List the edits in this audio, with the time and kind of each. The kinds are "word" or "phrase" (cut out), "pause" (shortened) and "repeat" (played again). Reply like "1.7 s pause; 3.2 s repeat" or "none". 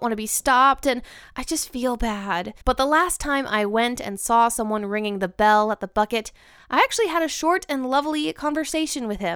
2.6 s pause